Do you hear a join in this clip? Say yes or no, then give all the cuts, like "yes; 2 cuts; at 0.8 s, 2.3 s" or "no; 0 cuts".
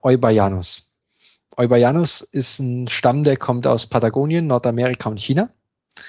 no; 0 cuts